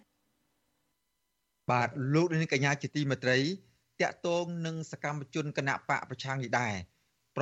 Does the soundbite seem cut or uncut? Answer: uncut